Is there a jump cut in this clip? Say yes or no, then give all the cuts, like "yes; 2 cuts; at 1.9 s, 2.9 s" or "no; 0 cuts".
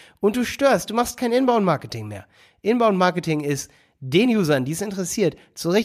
no; 0 cuts